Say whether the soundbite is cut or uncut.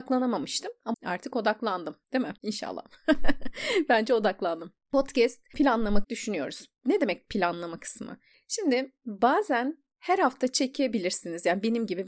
cut